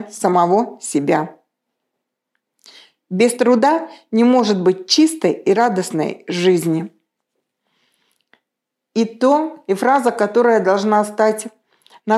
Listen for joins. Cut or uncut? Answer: uncut